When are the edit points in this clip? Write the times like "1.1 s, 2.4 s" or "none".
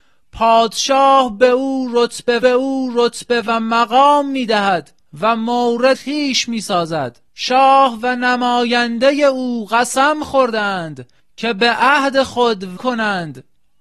2.4 s, 5.0 s, 5.9 s, 7.3 s, 11.2 s, 12.8 s

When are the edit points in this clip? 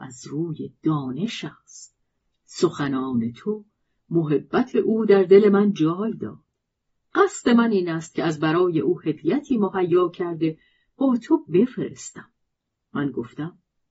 none

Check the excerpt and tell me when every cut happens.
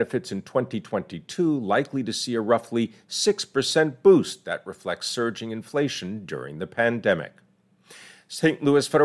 none

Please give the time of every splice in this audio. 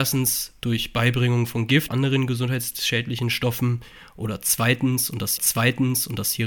1.9 s, 5.4 s

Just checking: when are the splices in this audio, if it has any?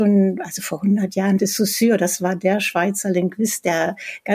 1.4 s

